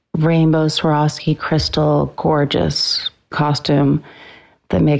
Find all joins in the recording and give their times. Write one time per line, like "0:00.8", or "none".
0:03.3